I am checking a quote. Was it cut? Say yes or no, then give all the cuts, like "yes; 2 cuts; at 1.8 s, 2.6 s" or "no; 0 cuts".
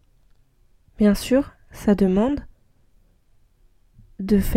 no; 0 cuts